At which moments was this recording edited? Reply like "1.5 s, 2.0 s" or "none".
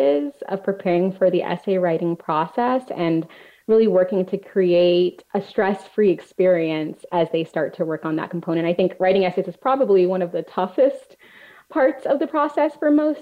none